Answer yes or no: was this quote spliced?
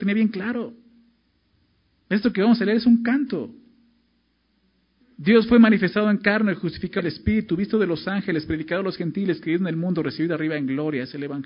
yes